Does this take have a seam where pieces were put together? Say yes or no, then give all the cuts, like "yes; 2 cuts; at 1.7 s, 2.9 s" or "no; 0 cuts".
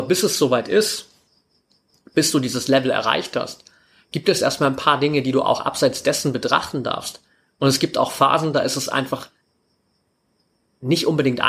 no; 0 cuts